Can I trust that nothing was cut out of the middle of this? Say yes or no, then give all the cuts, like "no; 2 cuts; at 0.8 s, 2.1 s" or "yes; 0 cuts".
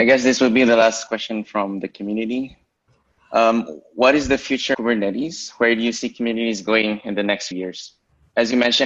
no; 2 cuts; at 4.7 s, 7.5 s